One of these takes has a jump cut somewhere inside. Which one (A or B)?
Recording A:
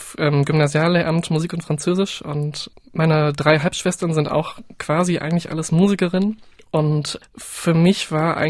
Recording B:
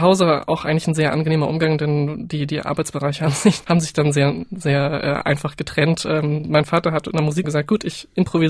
B